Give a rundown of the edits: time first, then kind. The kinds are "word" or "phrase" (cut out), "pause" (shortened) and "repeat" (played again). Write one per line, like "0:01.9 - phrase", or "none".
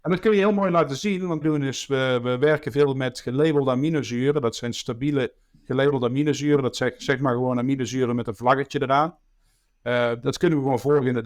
0:01.4 - phrase